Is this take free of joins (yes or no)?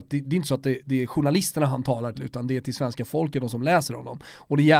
no